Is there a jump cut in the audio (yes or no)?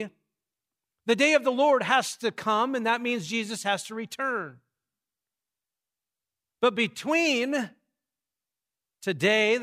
no